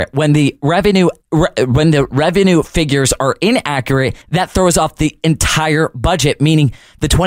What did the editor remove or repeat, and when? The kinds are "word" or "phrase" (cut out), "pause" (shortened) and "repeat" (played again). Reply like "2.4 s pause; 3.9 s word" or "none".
1.2 s pause; 4.2 s pause